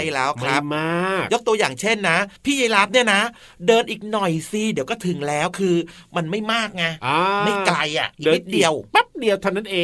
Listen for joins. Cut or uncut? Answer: cut